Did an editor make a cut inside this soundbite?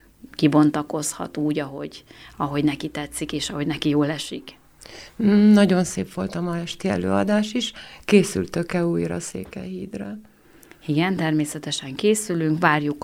no; 0 cuts

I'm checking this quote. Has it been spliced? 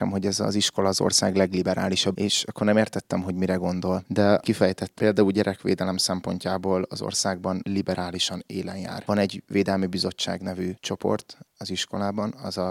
yes; 3 cuts; at 2.1 s, 4.4 s, 5.0 s

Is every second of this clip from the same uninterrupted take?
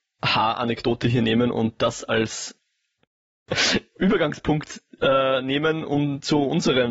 yes; 0 cuts

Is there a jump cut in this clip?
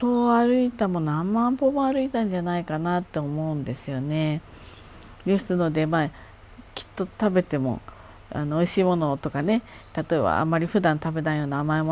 yes; 1 cut; at 6.7 s

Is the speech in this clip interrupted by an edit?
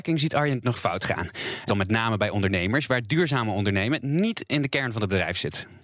yes; 1 cut; at 1.7 s

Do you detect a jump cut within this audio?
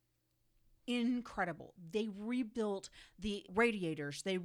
yes; 1 cut; at 3.5 s

